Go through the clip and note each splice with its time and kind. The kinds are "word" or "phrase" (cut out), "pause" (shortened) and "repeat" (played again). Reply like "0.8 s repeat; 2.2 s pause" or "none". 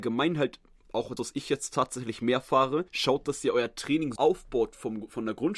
1.2 s word; 2.9 s pause; 4.2 s word

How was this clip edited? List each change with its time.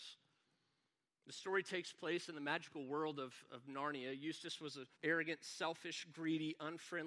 4.9 s pause

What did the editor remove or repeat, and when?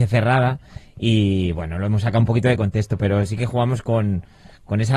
3.4 s phrase

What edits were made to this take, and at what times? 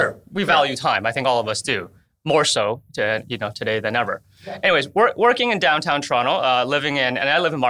none

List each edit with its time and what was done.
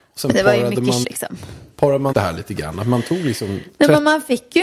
1.0 s word; 2.1 s word

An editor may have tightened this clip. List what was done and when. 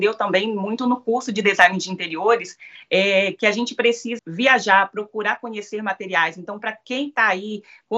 4.2 s word

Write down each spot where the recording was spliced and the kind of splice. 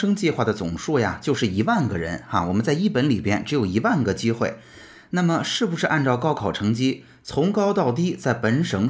none

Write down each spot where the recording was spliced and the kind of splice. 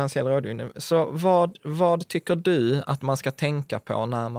none

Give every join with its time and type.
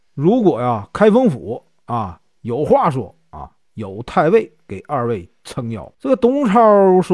5.9 s pause

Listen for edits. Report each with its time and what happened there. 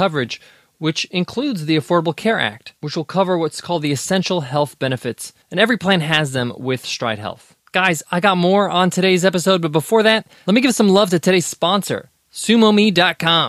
2.8 s pause; 5.4 s pause; 7.6 s pause

